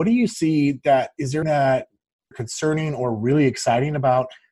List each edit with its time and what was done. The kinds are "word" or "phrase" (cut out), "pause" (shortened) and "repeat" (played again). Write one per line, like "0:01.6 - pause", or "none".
0:01.4 - word
0:02.3 - phrase